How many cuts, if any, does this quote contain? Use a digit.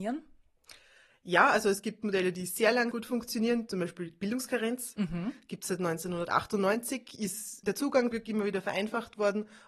3